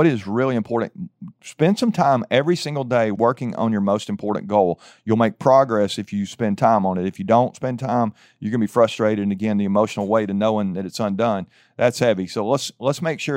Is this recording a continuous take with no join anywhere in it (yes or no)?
yes